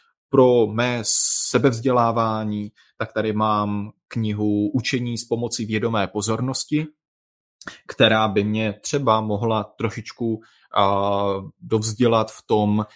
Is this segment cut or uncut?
uncut